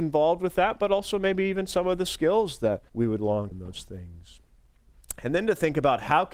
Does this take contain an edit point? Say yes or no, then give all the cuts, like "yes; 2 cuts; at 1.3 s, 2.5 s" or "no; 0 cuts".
yes; 2 cuts; at 2.9 s, 3.5 s